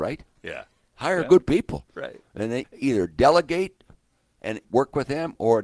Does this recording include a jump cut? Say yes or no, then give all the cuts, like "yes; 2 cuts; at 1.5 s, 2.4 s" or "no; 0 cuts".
yes; 2 cuts; at 2.6 s, 4.6 s